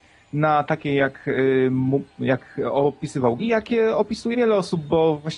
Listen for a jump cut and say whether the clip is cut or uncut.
cut